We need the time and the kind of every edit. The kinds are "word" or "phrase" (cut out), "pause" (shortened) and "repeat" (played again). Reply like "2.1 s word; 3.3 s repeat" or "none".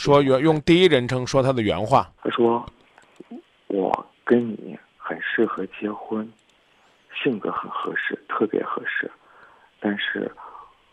2.2 s pause